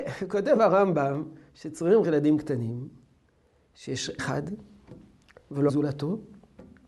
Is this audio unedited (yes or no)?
no